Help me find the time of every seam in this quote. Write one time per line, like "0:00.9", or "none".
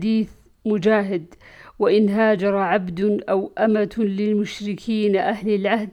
none